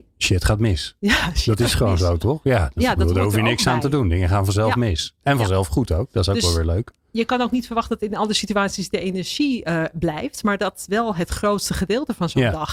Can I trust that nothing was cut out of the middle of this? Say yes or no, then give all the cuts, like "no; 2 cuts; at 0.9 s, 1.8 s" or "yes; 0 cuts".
yes; 0 cuts